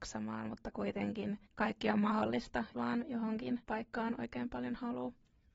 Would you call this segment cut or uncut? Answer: cut